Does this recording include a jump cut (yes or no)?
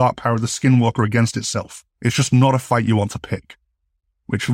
yes